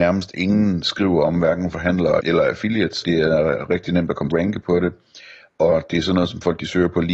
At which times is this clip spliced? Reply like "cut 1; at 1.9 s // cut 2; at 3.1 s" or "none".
cut 1; at 2.2 s // cut 2; at 3.0 s // cut 3; at 4.3 s